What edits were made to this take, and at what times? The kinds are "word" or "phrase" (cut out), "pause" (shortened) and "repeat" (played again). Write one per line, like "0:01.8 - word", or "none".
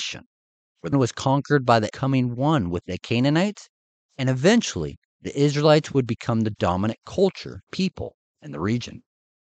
0:00.9 - word
0:01.9 - word
0:07.7 - word